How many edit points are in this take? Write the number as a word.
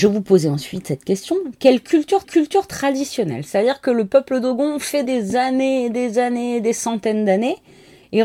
two